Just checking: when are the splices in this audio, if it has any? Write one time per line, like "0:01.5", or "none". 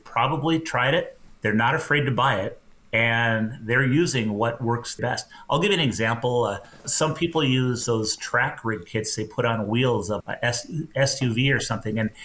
0:01.3
0:02.8
0:05.0
0:06.8
0:10.2